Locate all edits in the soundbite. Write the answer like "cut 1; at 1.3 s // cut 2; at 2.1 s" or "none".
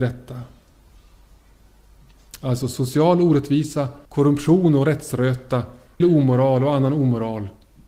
cut 1; at 4.0 s // cut 2; at 6.0 s